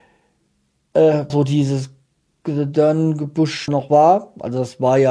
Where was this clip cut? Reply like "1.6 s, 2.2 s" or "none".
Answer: 1.3 s, 3.7 s

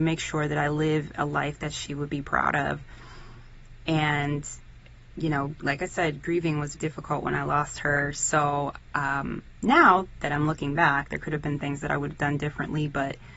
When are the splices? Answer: 6.7 s

